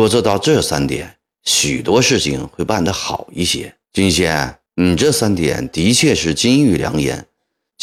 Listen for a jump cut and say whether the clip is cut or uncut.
cut